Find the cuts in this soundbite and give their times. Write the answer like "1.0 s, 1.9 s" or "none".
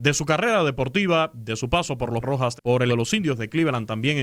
2.2 s, 2.6 s, 2.9 s